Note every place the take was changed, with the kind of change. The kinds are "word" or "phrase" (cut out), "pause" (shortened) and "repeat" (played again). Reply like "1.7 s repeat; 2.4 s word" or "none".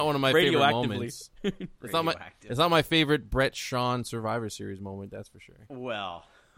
1.8 s pause